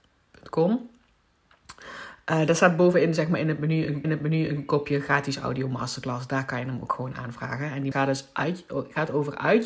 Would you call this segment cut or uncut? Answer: cut